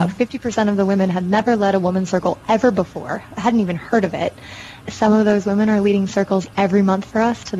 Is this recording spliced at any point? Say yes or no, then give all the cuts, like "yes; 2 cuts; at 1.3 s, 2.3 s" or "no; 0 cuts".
yes; 1 cut; at 4.8 s